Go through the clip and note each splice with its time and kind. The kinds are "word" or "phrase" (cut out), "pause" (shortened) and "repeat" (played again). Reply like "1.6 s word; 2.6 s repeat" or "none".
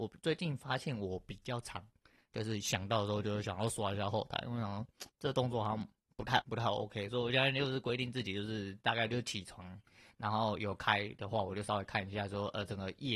5.1 s pause; 6.4 s word